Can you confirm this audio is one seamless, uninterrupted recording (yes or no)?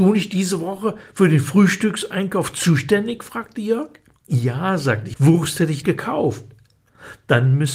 no